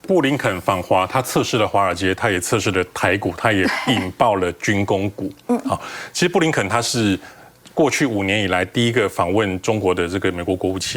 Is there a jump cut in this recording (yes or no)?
no